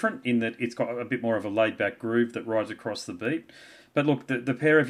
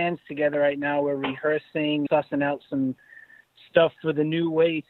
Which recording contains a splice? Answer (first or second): second